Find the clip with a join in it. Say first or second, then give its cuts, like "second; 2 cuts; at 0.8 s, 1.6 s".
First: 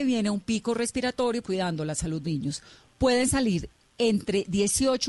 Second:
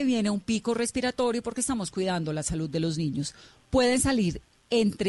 first; 2 cuts; at 1.4 s, 2.2 s